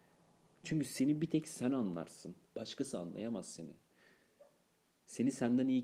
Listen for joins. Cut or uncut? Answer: cut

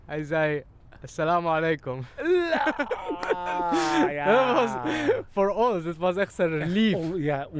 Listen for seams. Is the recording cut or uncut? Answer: uncut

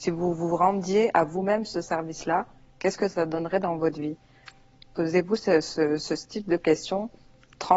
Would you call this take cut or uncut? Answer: uncut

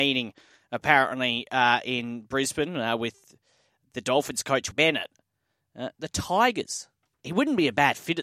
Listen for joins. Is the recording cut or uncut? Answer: cut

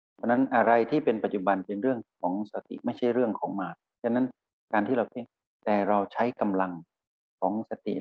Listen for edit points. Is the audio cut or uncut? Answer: uncut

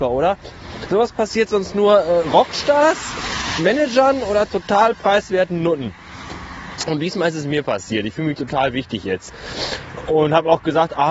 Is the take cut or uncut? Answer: uncut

